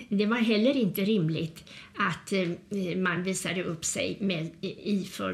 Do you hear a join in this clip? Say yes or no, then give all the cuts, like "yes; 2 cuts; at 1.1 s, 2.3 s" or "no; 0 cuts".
no; 0 cuts